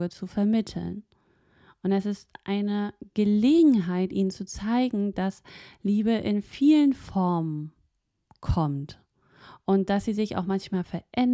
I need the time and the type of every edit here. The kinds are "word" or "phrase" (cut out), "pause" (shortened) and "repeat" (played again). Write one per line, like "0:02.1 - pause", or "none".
none